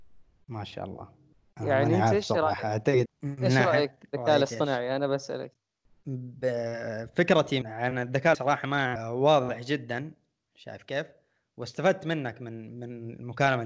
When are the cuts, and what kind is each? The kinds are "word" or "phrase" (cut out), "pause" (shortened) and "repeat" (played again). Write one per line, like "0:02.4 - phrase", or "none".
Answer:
0:03.1 - word
0:07.6 - word
0:08.3 - word
0:09.0 - phrase

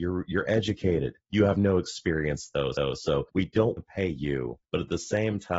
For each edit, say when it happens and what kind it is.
0:02.7 - repeat
0:03.8 - word

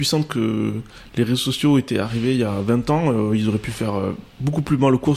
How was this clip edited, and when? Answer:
none

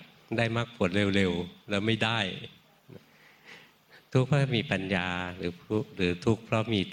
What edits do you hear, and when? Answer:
none

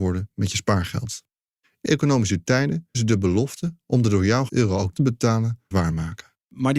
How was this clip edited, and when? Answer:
0:01.8 - word
0:02.9 - word
0:04.5 - word
0:04.9 - word
0:05.7 - word

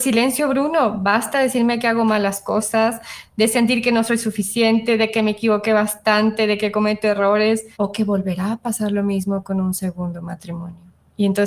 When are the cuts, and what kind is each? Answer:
0:07.7 - pause

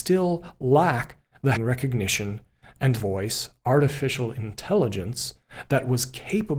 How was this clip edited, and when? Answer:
0:01.6 - word
0:03.0 - word

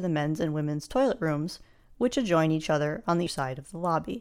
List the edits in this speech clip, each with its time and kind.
0:03.3 - word

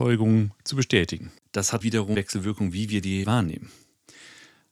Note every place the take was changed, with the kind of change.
0:01.8 - word
0:02.1 - word
0:03.2 - word

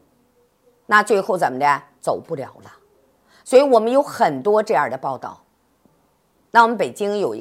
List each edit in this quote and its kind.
none

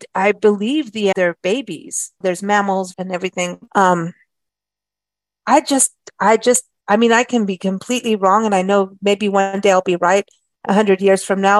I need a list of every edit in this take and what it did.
0:01.1 - phrase
0:02.2 - phrase
0:02.9 - phrase
0:03.7 - word

